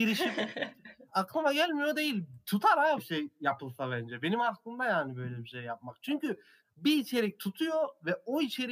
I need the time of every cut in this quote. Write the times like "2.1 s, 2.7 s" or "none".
1.1 s, 3.0 s, 6.6 s